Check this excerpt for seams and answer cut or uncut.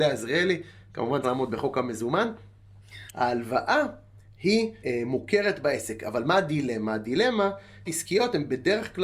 cut